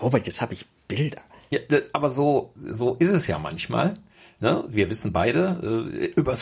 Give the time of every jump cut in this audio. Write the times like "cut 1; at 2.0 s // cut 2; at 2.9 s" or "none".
none